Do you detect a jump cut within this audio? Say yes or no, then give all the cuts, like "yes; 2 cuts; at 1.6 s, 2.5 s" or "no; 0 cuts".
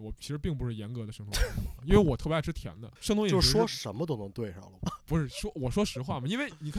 yes; 3 cuts; at 1.8 s, 3.0 s, 4.8 s